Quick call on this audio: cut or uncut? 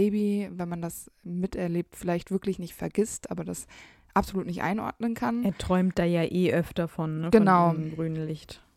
uncut